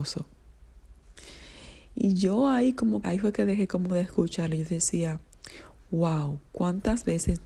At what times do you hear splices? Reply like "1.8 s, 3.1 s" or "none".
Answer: 3.0 s